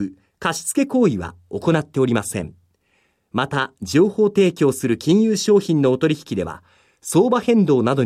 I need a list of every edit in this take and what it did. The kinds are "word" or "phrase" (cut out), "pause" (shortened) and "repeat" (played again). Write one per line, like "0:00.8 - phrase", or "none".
none

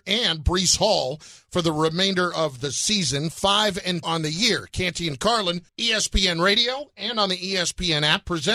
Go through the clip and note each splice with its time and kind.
0:04.0 - word
0:05.7 - pause

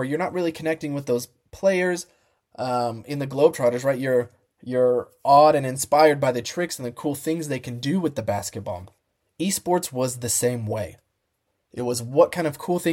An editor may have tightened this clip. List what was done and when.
none

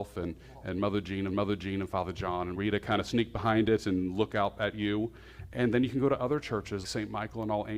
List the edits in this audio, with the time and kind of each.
0:01.3 - repeat
0:02.5 - word
0:06.8 - word

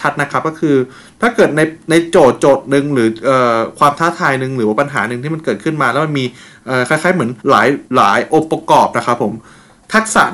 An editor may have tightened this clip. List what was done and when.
0:07.4 - pause
0:07.9 - pause

